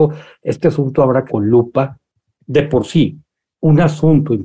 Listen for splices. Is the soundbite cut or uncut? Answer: cut